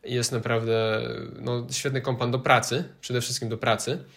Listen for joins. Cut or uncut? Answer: uncut